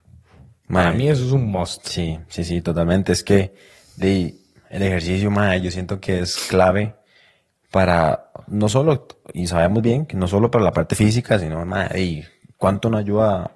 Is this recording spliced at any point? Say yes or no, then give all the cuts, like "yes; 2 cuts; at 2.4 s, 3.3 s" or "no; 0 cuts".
no; 0 cuts